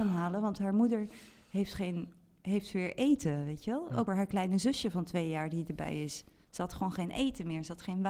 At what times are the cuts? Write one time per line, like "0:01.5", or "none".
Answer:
0:04.1